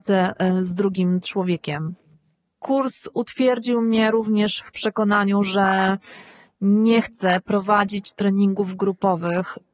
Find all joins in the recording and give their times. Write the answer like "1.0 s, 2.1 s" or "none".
none